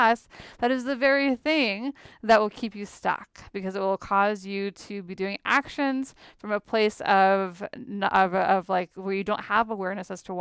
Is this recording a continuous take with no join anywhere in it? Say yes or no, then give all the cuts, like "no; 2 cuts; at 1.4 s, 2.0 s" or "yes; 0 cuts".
yes; 0 cuts